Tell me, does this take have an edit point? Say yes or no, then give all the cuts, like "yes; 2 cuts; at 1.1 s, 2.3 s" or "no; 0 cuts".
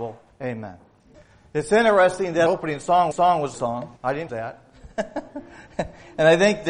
yes; 6 cuts; at 1.1 s, 2.5 s, 3.1 s, 3.5 s, 4.0 s, 4.3 s